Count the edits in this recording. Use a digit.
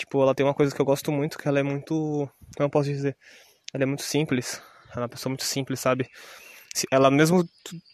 0